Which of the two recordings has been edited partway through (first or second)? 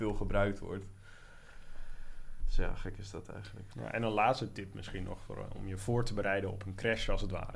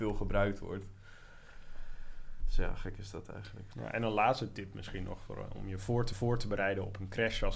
second